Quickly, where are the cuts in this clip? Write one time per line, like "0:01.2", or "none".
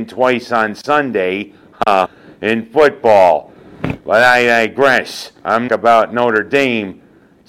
0:02.1
0:04.0
0:05.7